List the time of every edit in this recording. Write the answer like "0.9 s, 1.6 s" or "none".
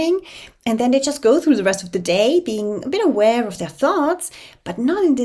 none